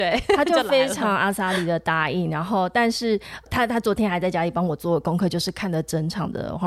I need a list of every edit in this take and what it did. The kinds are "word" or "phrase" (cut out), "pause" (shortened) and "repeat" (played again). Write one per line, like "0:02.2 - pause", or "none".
none

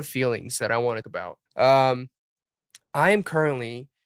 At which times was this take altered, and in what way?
0:01.0 - word
0:01.5 - pause

